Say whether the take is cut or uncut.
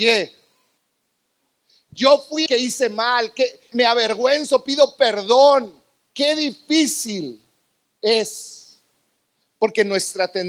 cut